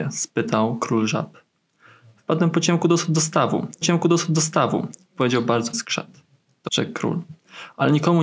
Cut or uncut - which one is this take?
cut